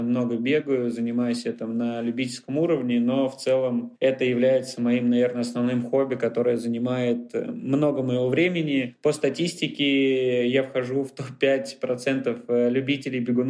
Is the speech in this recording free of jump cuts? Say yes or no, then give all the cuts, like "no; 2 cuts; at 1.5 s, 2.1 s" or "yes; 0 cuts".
yes; 0 cuts